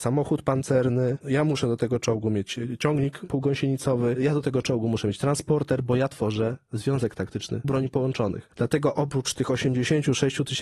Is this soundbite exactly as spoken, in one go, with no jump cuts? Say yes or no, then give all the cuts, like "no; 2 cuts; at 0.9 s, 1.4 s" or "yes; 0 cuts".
no; 1 cut; at 7.6 s